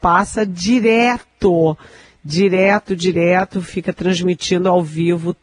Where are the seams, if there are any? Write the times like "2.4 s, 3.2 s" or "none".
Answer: none